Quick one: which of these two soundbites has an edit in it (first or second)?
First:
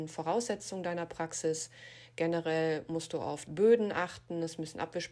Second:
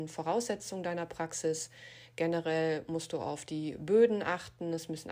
first